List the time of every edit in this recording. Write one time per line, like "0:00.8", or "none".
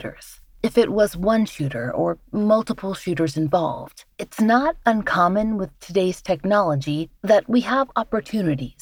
0:04.1